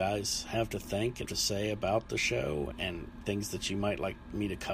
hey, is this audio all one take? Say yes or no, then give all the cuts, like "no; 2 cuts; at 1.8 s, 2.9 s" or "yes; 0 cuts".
no; 2 cuts; at 1.2 s, 2.7 s